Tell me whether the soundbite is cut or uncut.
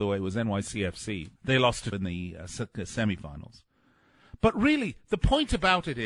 cut